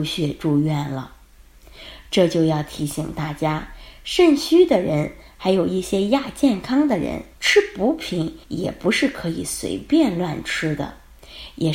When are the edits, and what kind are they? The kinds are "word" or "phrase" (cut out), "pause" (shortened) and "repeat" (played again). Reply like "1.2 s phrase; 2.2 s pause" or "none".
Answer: 7.3 s pause; 8.4 s pause